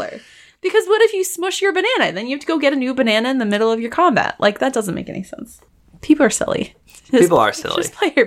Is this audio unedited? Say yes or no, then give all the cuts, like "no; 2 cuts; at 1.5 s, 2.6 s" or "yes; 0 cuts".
yes; 0 cuts